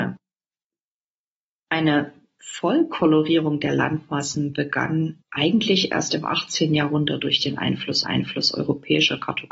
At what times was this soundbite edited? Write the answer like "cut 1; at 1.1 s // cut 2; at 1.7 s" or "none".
cut 1; at 5.2 s // cut 2; at 8.0 s